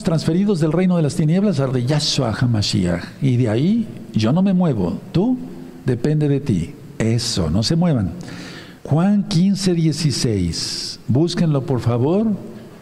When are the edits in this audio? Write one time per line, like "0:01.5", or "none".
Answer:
0:01.7
0:08.8